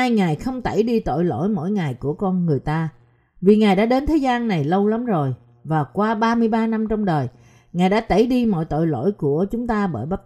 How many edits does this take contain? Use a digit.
0